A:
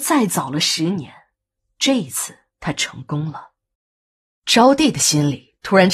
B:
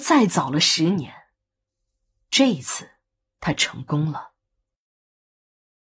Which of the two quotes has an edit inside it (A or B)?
A